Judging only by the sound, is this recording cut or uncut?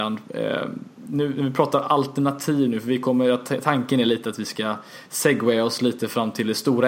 uncut